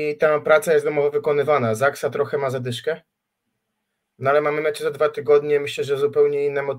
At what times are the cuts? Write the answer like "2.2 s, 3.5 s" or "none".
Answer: none